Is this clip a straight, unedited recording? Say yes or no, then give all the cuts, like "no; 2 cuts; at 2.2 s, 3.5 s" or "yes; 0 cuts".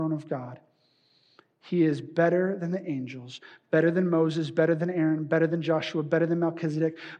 yes; 0 cuts